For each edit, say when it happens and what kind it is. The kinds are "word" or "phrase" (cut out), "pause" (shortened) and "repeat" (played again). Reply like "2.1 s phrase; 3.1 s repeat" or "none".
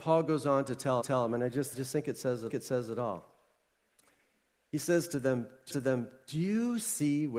1.0 s repeat; 1.7 s phrase; 2.5 s repeat; 5.7 s repeat